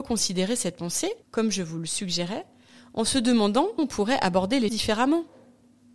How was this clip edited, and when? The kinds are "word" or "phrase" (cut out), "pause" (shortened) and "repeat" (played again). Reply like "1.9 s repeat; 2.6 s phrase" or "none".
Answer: 1.2 s pause; 3.8 s word; 4.7 s word